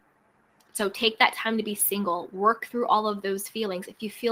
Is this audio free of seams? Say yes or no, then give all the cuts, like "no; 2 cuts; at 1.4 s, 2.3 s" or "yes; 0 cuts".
yes; 0 cuts